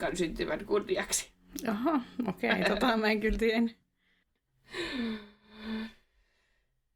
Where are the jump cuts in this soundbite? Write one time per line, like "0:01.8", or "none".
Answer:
none

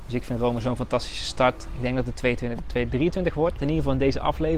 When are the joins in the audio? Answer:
0:03.6

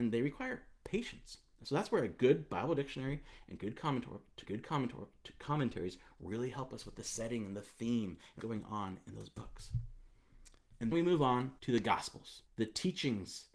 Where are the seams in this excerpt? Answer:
0:04.4
0:08.4
0:10.9
0:11.6
0:12.5

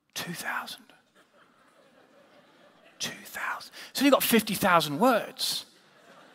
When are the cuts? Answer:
none

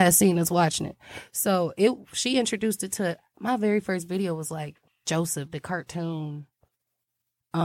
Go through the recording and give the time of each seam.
0:04.9

